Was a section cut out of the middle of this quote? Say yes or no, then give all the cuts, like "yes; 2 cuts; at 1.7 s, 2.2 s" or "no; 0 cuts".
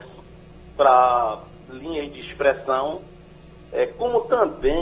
no; 0 cuts